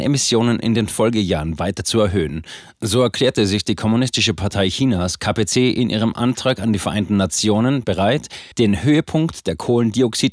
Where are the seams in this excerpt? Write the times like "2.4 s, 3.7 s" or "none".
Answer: 8.5 s